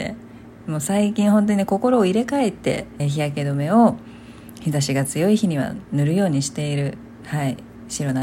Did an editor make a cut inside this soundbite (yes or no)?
yes